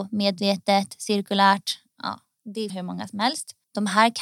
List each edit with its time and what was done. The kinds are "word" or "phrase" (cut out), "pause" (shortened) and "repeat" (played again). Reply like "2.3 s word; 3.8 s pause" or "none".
2.7 s phrase